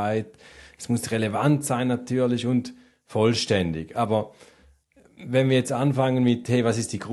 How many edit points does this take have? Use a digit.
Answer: 0